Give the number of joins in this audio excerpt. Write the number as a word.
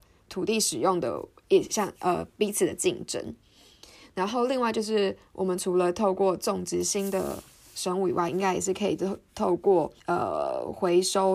one